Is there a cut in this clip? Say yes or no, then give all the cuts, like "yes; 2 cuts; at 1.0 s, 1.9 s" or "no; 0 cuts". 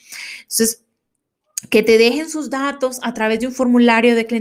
no; 0 cuts